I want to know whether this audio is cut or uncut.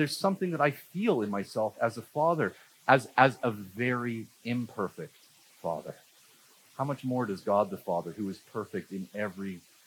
uncut